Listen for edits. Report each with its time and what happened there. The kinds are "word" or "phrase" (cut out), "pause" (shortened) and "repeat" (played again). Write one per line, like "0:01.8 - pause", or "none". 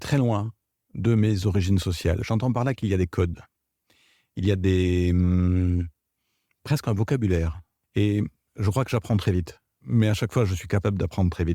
none